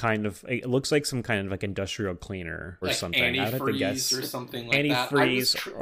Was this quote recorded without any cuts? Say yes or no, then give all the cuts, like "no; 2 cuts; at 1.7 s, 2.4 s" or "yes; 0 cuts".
no; 1 cut; at 2.8 s